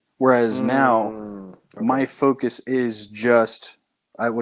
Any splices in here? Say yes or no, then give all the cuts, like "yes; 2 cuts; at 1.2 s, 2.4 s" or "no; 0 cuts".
no; 0 cuts